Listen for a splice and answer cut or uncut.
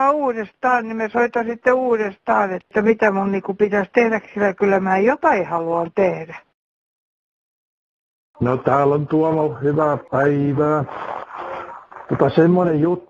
uncut